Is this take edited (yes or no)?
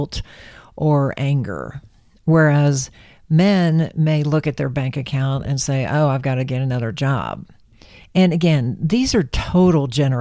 no